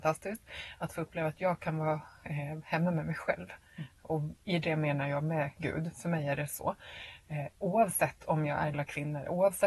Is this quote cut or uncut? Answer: cut